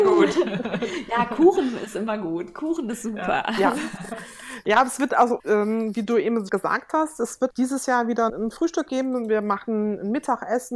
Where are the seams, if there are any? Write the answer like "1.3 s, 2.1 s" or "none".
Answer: 5.4 s, 6.5 s, 7.5 s, 8.3 s